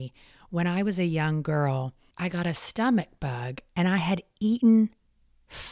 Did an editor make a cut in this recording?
no; 0 cuts

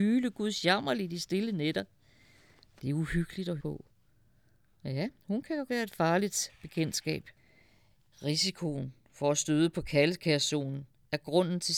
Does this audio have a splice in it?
yes; 3 cuts; at 3.6 s, 5.2 s, 5.7 s

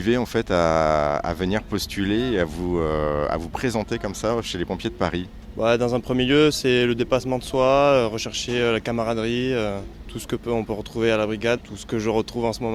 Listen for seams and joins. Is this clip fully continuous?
no; 1 cut; at 11.6 s

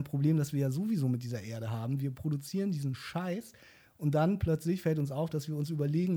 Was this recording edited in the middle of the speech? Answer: no; 0 cuts

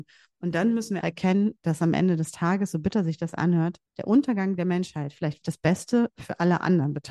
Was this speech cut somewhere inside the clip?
yes; 3 cuts; at 1.0 s, 3.9 s, 5.4 s

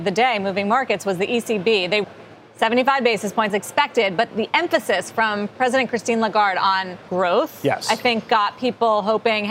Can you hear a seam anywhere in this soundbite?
yes; 4 cuts; at 2.0 s, 3.5 s, 4.3 s, 7.1 s

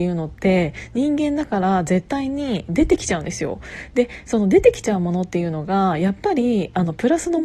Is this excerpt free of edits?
yes; 0 cuts

